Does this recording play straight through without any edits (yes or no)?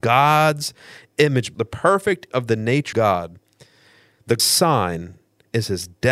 no